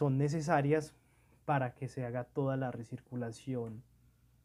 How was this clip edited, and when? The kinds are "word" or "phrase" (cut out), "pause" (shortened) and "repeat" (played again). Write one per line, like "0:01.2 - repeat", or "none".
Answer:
none